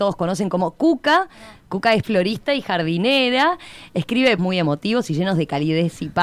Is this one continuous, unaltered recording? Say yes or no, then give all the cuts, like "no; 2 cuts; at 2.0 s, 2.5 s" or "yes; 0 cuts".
no; 2 cuts; at 2.0 s, 4.4 s